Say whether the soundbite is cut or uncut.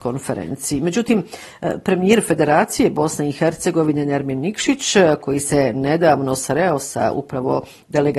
uncut